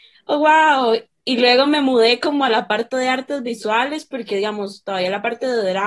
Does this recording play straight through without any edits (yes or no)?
yes